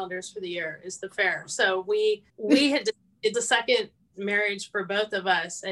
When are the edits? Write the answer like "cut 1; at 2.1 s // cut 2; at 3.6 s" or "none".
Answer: cut 1; at 2.3 s // cut 2; at 3.3 s